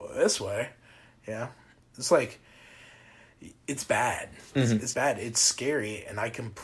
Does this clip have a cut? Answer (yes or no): yes